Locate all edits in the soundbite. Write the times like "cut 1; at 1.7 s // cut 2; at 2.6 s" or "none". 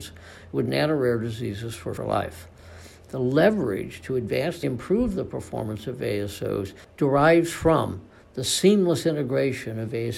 cut 1; at 2.0 s // cut 2; at 4.6 s